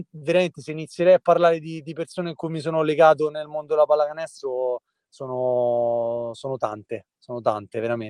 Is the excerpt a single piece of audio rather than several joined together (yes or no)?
yes